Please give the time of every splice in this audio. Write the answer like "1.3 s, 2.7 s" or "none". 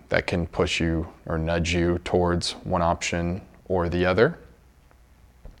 1.2 s